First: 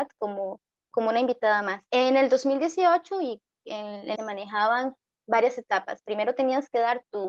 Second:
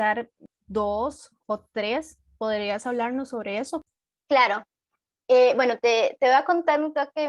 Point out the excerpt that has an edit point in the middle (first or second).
first